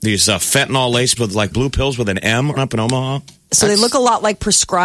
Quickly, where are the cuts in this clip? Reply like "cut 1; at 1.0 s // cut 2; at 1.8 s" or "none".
cut 1; at 1.2 s // cut 2; at 1.5 s // cut 3; at 2.6 s